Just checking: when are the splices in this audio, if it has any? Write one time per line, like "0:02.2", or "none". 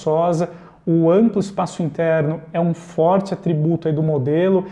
none